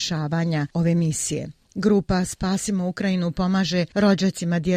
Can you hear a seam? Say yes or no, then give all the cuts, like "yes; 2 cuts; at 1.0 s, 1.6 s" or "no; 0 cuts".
no; 0 cuts